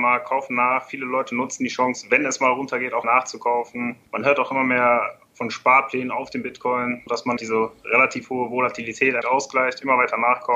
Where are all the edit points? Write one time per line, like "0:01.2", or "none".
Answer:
0:03.0
0:04.1
0:07.1
0:07.4
0:09.2